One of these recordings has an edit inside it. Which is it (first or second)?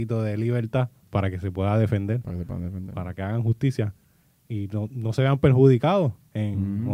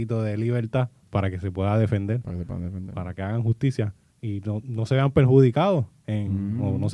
second